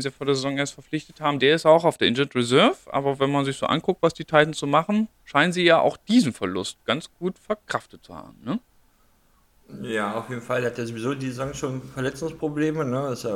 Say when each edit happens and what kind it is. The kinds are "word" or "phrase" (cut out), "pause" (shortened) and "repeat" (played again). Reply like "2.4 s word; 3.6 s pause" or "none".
5.1 s pause